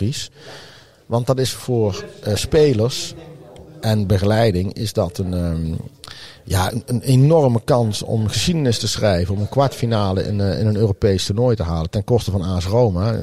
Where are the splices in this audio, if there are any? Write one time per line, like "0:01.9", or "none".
0:06.7